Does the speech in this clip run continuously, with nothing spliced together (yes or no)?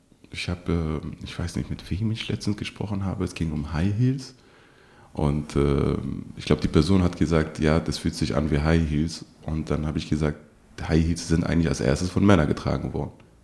yes